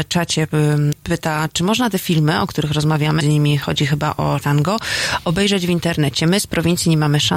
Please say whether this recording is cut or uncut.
cut